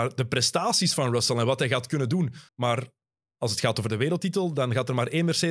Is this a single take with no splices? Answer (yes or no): no